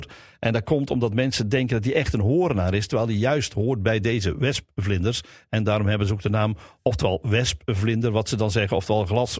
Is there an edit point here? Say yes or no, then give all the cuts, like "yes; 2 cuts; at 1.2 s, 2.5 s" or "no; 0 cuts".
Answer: no; 0 cuts